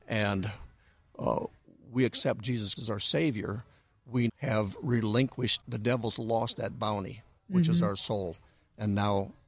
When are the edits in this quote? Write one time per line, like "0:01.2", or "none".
0:02.8
0:04.3
0:05.6